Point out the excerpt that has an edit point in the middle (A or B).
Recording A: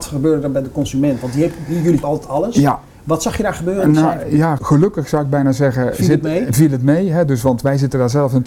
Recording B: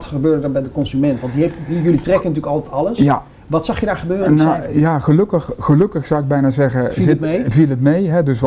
A